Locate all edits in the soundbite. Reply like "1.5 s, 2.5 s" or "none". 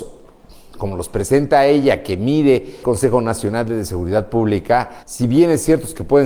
2.8 s, 5.0 s